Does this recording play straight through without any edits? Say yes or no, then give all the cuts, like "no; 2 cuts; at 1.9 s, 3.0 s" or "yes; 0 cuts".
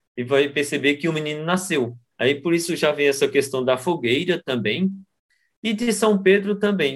yes; 0 cuts